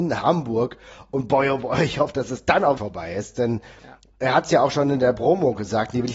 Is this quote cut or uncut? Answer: cut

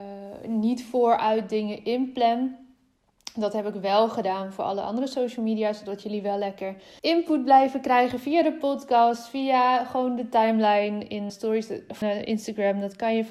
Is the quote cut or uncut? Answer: cut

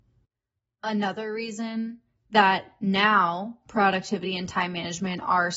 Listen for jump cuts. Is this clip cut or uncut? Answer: uncut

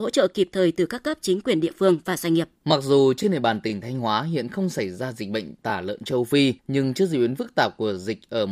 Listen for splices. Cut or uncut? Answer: cut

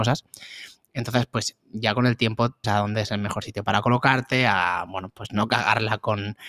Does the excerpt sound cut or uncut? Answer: cut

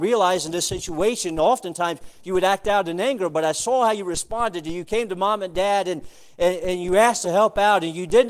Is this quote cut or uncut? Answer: cut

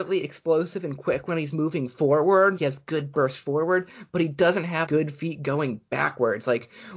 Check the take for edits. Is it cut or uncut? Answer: cut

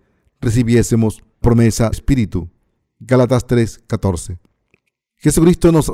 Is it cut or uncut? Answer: cut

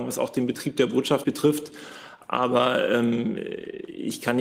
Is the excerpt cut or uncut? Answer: cut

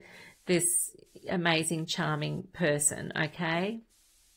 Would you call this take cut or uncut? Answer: uncut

